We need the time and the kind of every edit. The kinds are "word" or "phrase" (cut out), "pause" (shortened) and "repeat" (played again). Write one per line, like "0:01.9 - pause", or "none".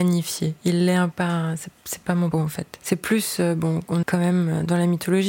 0:01.1 - phrase
0:02.3 - word
0:04.0 - word